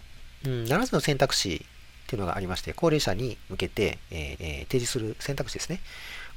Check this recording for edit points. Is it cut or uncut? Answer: cut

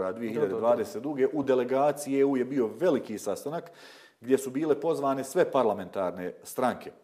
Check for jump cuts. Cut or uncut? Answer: uncut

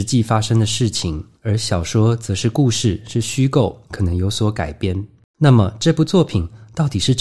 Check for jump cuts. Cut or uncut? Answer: cut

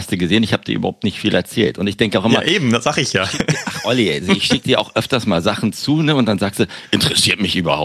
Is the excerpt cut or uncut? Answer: uncut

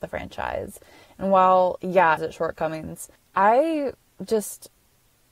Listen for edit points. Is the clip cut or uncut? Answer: cut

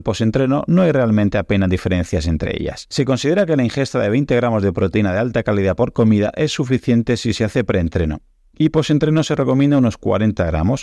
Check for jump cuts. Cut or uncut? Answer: uncut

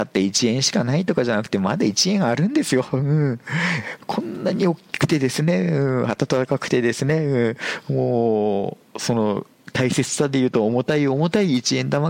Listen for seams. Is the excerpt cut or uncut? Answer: cut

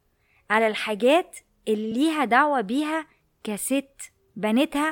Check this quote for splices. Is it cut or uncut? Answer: uncut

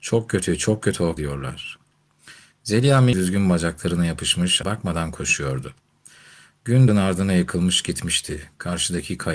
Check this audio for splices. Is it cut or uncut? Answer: cut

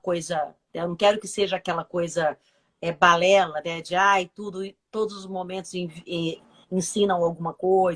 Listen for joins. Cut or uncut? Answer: uncut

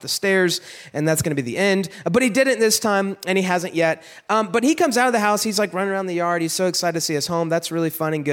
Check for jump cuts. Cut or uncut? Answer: uncut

